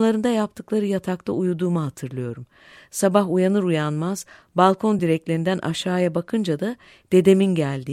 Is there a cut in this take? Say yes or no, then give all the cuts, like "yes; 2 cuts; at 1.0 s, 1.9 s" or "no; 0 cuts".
no; 0 cuts